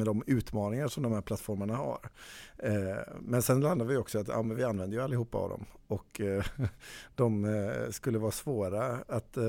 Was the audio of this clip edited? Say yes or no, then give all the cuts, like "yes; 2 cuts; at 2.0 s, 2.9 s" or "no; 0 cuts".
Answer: no; 0 cuts